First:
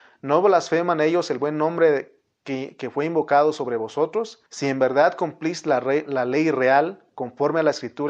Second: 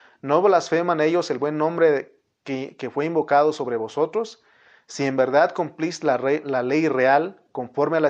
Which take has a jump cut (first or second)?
first